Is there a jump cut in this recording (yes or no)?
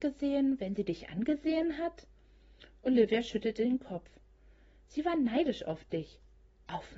no